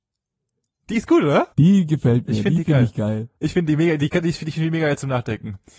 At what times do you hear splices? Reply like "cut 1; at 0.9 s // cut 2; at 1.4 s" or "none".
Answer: cut 1; at 1.5 s // cut 2; at 3.4 s